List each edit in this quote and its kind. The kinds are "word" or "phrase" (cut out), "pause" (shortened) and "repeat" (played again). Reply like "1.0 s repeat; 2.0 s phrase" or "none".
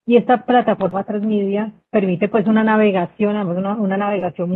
none